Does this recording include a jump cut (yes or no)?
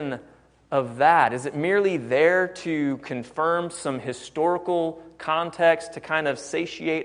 no